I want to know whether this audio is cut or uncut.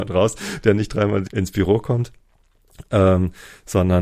cut